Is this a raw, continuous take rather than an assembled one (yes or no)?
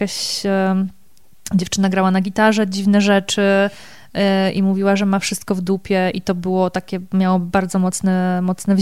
yes